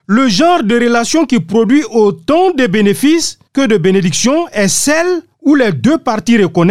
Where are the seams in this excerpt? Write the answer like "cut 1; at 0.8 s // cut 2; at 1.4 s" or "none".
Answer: cut 1; at 3.5 s // cut 2; at 5.3 s